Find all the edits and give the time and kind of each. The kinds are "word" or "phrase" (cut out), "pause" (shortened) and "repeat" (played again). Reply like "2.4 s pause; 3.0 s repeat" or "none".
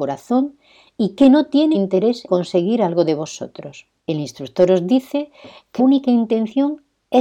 1.7 s word; 2.3 s word; 4.0 s pause; 5.8 s word